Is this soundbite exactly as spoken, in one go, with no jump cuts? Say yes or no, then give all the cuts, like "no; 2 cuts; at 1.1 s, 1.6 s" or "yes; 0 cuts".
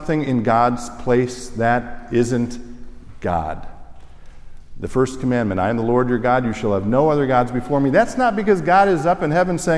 yes; 0 cuts